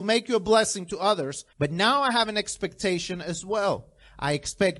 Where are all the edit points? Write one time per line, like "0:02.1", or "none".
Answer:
0:01.5